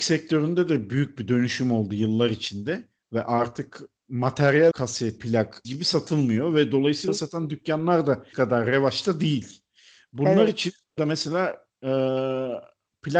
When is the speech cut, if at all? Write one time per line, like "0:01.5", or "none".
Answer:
0:04.7
0:05.2
0:05.6
0:07.1
0:08.3
0:11.0